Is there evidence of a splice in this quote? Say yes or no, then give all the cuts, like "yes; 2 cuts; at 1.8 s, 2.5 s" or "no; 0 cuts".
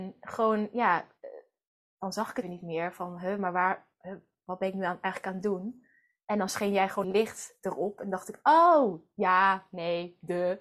yes; 2 cuts; at 2.4 s, 7.0 s